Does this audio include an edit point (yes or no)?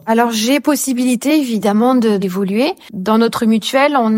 no